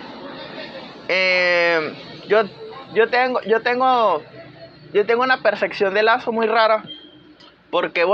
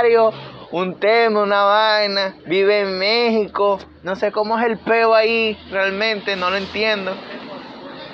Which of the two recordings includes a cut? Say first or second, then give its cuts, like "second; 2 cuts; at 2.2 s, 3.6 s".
second; 2 cuts; at 2.4 s, 3.9 s